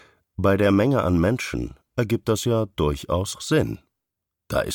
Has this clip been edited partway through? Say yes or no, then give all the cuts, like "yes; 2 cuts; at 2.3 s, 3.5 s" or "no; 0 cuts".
yes; 1 cut; at 3.3 s